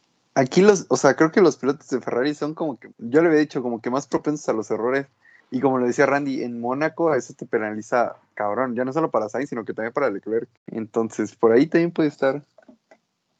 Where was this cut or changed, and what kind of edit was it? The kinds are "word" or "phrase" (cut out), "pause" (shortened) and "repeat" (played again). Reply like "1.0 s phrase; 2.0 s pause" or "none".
2.9 s pause; 5.4 s pause; 10.6 s pause